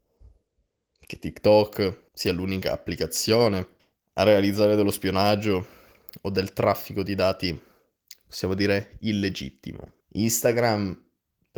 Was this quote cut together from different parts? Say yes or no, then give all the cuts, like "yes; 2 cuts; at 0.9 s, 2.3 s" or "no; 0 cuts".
yes; 3 cuts; at 2.1 s, 3.8 s, 10.0 s